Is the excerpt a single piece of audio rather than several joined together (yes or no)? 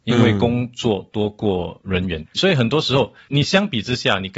no